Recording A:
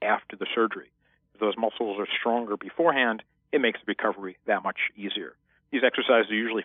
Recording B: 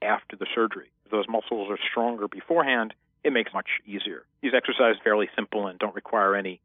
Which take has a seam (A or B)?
B